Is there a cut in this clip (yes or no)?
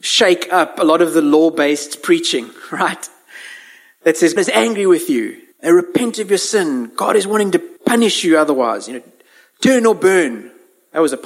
yes